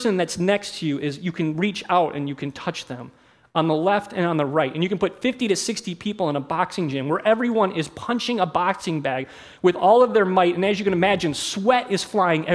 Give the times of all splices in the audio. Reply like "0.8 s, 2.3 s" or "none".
none